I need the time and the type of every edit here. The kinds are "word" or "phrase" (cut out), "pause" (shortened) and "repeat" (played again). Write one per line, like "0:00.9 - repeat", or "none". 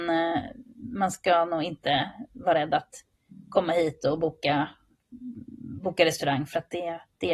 none